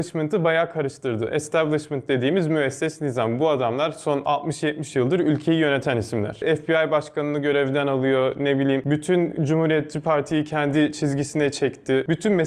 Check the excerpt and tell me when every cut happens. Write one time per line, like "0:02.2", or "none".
none

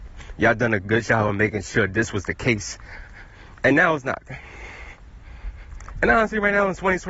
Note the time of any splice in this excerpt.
none

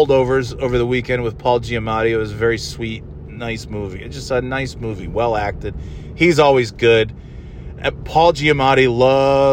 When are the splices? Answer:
none

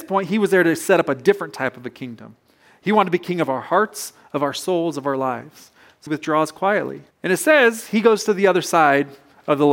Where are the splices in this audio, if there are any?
0:06.1
0:07.1

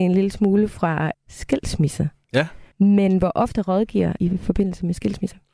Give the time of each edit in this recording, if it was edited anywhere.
0:01.1
0:02.7
0:04.2

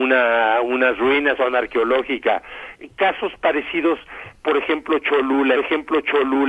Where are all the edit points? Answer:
0:01.4
0:05.5

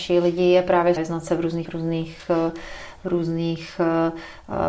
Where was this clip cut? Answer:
0:01.0
0:01.7

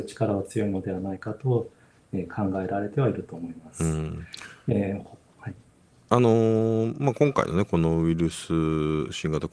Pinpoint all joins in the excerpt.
none

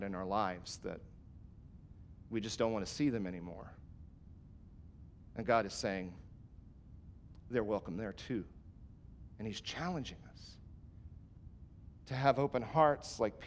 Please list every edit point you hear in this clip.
none

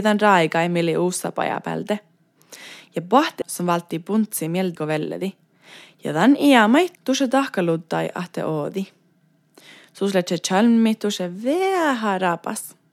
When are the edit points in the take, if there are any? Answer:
0:03.4
0:04.8
0:06.9

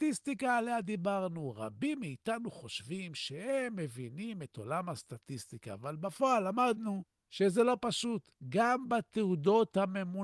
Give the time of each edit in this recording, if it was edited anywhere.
0:07.2

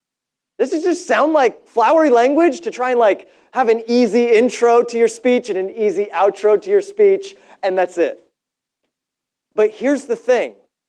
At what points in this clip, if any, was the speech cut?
none

